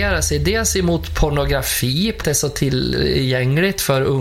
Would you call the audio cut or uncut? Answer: cut